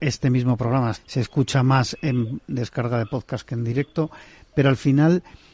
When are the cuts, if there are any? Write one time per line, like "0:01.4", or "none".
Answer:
0:00.9